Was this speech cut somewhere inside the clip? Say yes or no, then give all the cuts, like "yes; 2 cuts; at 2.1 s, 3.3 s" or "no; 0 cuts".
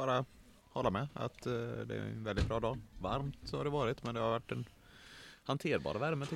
no; 0 cuts